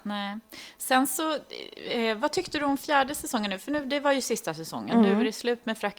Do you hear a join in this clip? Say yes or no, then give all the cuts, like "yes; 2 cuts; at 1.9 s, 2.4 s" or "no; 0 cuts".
no; 0 cuts